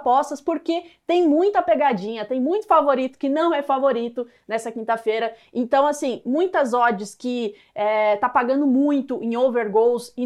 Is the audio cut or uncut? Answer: uncut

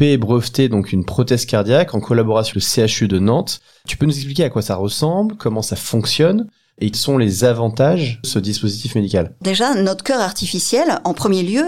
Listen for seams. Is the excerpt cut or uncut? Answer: cut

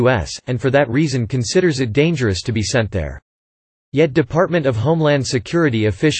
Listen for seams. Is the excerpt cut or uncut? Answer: uncut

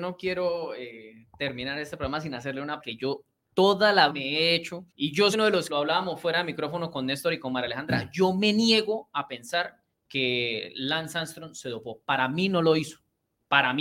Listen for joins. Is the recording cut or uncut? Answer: cut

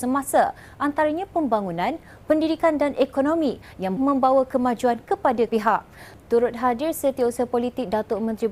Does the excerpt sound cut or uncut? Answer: cut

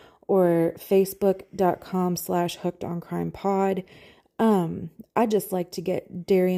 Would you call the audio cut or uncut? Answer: uncut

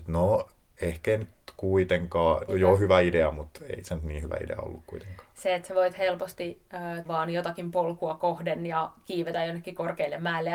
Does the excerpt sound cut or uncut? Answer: cut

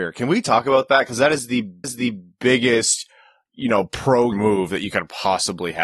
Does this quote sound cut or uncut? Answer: cut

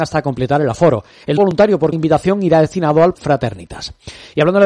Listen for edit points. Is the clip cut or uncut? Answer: cut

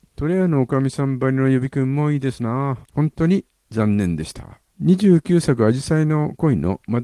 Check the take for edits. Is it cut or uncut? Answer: cut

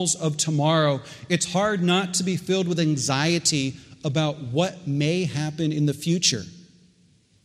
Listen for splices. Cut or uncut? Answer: uncut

